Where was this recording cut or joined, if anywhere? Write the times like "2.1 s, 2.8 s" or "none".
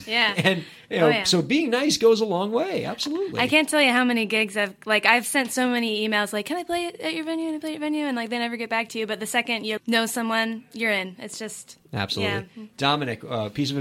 9.8 s, 11.8 s